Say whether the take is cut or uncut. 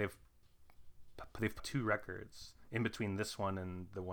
cut